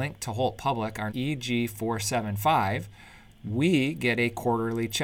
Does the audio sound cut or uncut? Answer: cut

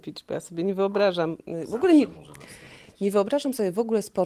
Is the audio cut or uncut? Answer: uncut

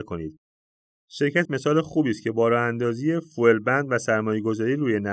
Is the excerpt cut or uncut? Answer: cut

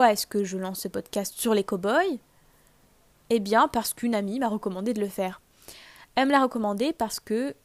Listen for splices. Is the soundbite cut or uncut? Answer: uncut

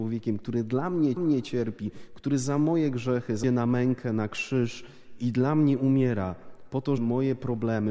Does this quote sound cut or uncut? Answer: cut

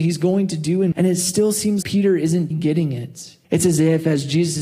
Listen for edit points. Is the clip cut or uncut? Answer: cut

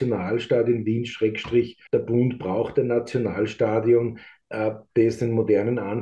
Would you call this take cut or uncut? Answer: cut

